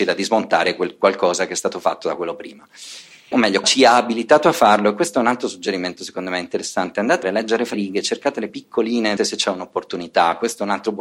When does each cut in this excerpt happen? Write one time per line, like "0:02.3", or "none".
0:03.3
0:03.6
0:07.2
0:07.7
0:08.5
0:09.2